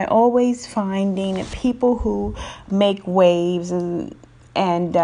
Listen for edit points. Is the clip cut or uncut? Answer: uncut